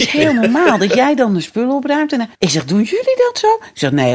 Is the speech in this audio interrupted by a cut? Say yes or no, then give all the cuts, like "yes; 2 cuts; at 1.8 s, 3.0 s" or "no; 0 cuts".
yes; 1 cut; at 2.3 s